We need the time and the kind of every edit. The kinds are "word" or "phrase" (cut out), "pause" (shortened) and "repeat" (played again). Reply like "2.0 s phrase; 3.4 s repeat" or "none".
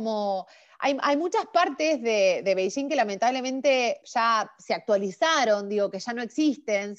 4.0 s word